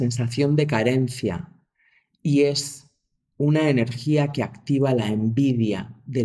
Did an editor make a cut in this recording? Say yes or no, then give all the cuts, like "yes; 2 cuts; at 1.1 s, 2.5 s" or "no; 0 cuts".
no; 0 cuts